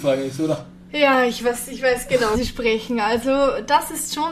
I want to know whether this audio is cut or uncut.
cut